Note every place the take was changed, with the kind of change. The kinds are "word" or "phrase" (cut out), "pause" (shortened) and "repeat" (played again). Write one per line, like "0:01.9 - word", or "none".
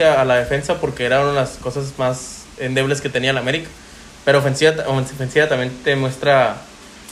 none